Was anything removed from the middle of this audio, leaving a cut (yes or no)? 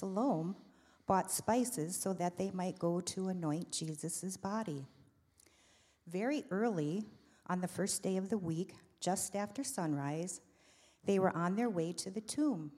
no